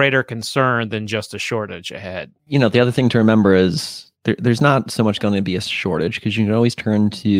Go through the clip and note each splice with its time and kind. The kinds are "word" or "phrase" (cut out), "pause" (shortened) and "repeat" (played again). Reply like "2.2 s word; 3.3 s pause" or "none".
2.4 s pause; 4.1 s pause